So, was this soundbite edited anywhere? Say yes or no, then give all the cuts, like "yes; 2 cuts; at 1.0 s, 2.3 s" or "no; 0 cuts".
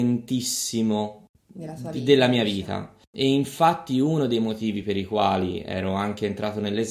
no; 0 cuts